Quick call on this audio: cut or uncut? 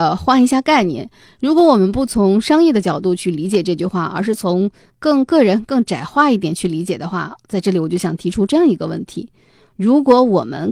uncut